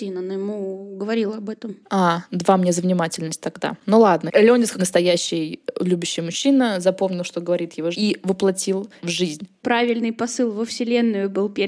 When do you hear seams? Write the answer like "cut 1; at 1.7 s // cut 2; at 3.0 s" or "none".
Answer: cut 1; at 1.8 s // cut 2; at 4.8 s // cut 3; at 7.9 s // cut 4; at 9.0 s